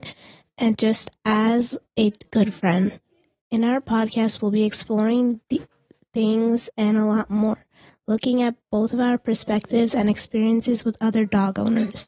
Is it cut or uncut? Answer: uncut